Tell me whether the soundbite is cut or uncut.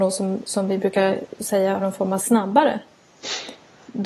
cut